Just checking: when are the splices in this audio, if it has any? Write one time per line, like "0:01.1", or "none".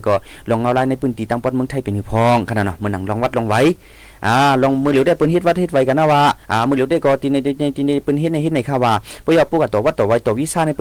0:06.4